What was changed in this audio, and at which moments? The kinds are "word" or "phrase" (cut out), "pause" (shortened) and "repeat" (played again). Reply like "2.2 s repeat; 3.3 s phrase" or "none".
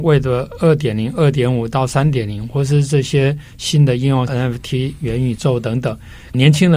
4.3 s word